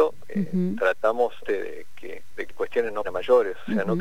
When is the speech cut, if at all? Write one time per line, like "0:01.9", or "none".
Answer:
0:01.4
0:02.5
0:03.0